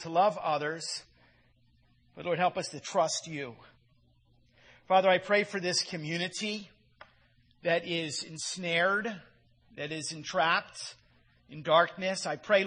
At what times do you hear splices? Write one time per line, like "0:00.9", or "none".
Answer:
none